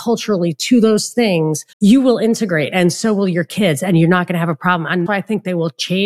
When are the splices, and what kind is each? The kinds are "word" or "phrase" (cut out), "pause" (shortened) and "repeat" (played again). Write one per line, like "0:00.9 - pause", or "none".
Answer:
0:01.7 - pause
0:05.1 - word

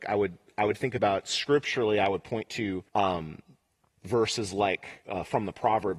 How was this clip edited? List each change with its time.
0:02.9 - pause

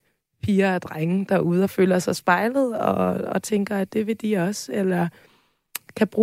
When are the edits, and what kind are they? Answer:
none

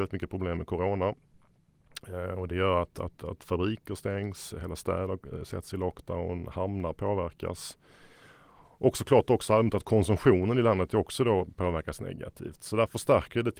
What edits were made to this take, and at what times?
none

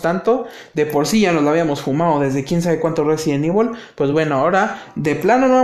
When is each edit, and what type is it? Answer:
none

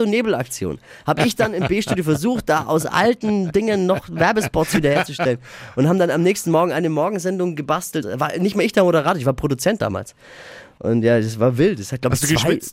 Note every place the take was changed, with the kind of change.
0:08.0 - word

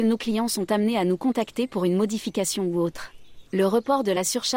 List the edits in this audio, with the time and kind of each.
0:03.5 - pause

